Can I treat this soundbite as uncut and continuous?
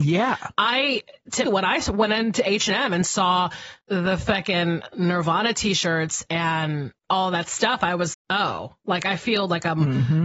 no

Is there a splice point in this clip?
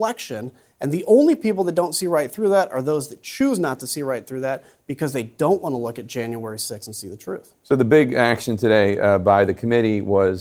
no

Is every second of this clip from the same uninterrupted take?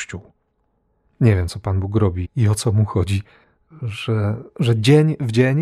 no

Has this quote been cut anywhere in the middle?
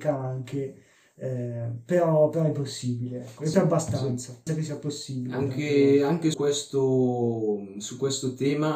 yes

